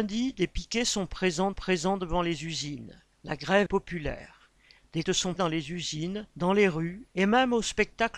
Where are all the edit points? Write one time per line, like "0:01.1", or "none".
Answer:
0:01.5
0:03.1
0:03.7
0:05.0
0:05.4
0:06.3
0:07.1

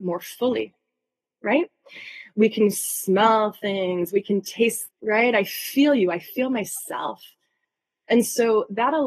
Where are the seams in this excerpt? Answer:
0:04.9

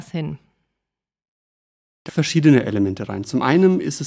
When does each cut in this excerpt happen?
0:02.1

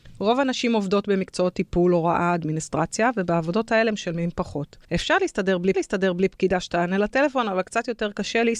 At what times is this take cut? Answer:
0:04.8
0:05.7

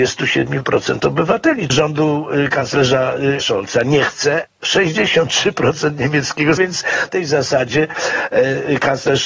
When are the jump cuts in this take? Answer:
0:01.7
0:03.4
0:04.6
0:06.6
0:07.1

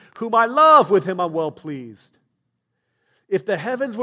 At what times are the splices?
none

